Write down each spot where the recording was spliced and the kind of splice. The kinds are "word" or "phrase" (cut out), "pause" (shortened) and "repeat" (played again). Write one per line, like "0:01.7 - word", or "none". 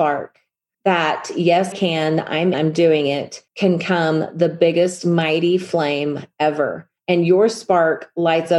0:01.7 - word
0:02.5 - word
0:03.5 - pause
0:07.0 - pause